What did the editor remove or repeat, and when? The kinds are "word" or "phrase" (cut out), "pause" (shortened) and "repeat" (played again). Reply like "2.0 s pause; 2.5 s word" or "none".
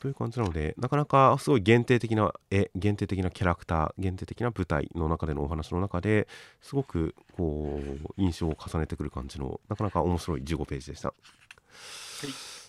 9.6 s pause

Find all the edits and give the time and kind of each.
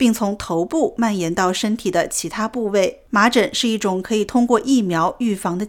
3.1 s pause

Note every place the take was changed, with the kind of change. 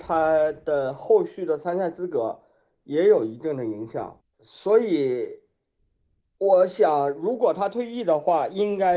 4.2 s pause

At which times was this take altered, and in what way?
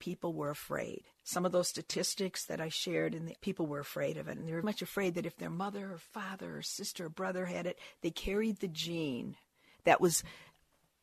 3.4 s word; 4.6 s word

